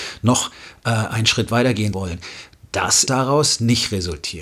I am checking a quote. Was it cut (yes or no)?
yes